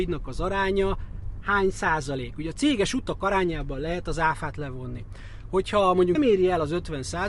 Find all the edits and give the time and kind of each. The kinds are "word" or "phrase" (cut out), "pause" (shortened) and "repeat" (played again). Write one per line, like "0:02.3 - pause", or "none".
0:06.1 - word